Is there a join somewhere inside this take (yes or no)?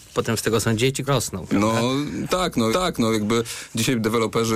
yes